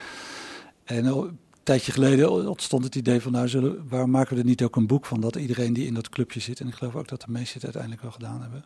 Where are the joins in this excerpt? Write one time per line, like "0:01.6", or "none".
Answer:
none